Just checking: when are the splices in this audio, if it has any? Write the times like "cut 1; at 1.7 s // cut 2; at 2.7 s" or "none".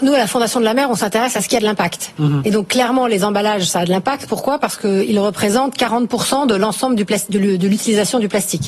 none